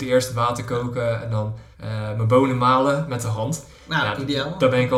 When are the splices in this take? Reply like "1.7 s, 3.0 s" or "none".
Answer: 1.7 s